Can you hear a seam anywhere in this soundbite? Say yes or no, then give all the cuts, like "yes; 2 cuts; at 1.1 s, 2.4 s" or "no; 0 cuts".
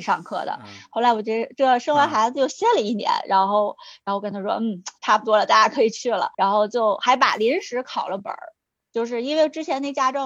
yes; 1 cut; at 6.3 s